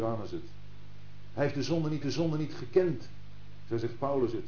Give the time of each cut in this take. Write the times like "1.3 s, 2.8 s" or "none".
2.0 s